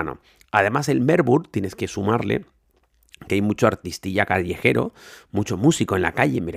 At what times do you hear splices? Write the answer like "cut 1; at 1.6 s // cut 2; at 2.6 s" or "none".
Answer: none

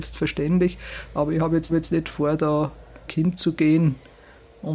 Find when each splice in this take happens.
cut 1; at 1.7 s // cut 2; at 3.1 s

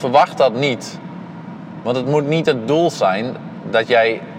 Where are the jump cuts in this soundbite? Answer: none

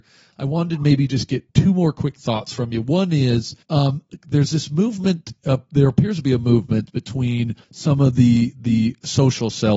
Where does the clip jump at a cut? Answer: cut 1; at 1.5 s // cut 2; at 3.6 s // cut 3; at 7.6 s

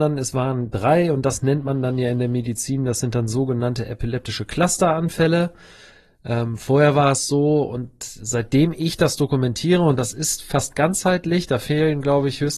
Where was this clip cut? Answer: none

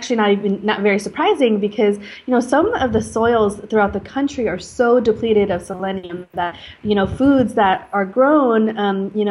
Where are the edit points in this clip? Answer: none

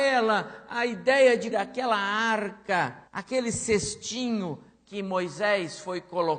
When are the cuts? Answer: cut 1; at 1.5 s // cut 2; at 3.1 s

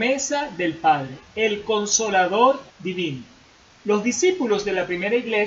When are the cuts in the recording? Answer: cut 1; at 2.7 s

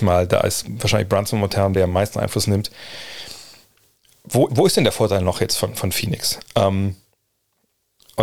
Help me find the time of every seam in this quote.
cut 1; at 1.7 s // cut 2; at 4.5 s

